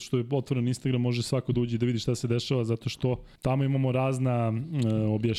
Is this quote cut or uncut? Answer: cut